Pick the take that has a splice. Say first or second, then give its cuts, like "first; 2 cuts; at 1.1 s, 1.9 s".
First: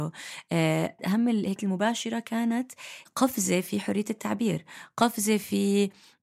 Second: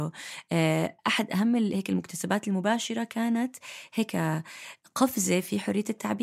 first; 3 cuts; at 1.0 s, 1.6 s, 3.1 s